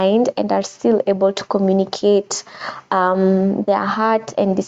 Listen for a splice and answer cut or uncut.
uncut